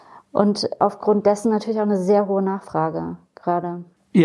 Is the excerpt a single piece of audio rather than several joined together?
yes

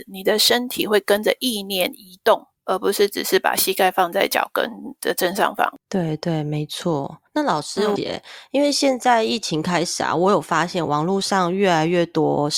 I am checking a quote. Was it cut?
yes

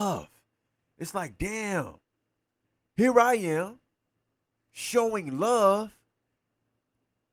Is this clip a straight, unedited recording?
yes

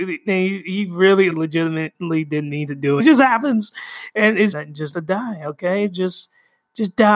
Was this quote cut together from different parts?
yes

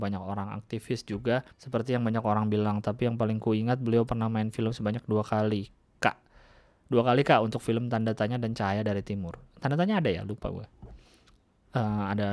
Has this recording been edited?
yes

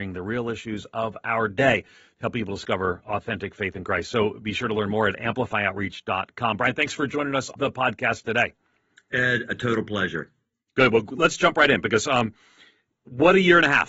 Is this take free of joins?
no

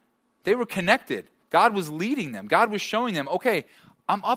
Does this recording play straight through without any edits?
no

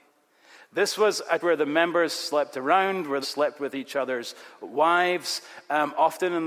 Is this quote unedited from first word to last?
no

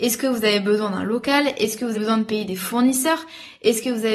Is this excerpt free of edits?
no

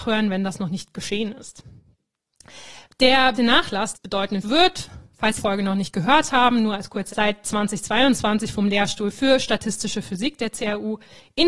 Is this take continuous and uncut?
no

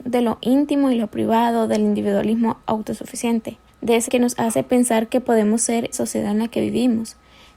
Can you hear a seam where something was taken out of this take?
yes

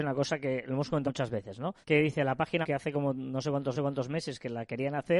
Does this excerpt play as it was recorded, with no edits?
no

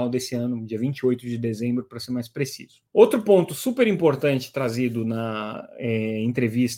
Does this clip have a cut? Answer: yes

